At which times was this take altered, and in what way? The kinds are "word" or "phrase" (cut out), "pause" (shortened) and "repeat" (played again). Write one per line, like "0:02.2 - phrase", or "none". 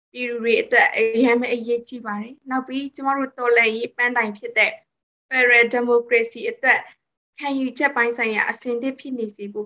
none